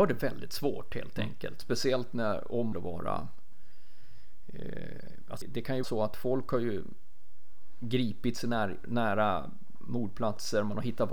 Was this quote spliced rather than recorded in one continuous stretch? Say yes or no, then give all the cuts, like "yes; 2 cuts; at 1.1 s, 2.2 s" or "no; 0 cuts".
yes; 3 cuts; at 2.7 s, 5.4 s, 5.8 s